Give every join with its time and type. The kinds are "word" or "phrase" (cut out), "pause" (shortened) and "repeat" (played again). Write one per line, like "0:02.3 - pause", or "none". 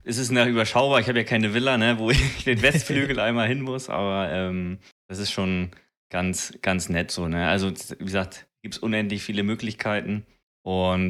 none